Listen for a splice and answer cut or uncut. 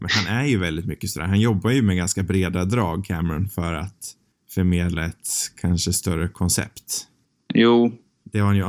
uncut